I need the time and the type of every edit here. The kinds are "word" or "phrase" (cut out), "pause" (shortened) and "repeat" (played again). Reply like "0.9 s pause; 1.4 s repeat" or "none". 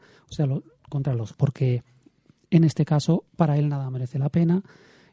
1.3 s word